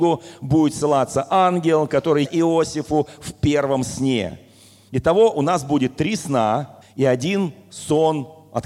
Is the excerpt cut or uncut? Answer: cut